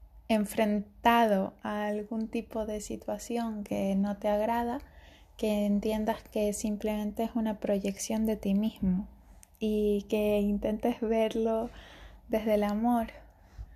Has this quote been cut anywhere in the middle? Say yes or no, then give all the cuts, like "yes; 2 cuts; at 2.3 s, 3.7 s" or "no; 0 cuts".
no; 0 cuts